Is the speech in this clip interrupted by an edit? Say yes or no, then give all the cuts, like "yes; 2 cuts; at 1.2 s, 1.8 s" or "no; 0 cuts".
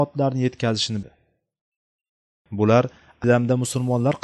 yes; 2 cuts; at 1.0 s, 3.2 s